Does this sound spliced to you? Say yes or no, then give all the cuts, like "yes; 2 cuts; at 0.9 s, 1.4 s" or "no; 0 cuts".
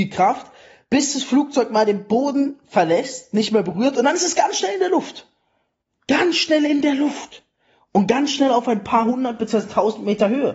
no; 0 cuts